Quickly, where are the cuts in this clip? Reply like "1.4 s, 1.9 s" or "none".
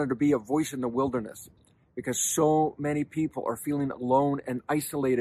none